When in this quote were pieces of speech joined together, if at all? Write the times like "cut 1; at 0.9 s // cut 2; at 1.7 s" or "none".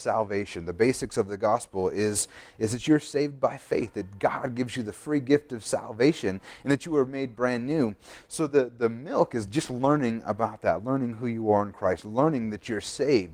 none